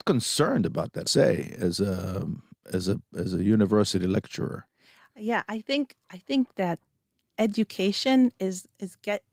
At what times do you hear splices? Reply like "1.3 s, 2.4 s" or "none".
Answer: 1.1 s